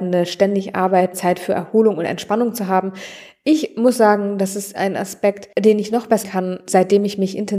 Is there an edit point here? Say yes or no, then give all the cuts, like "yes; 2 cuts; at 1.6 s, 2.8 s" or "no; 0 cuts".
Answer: yes; 2 cuts; at 1.1 s, 6.2 s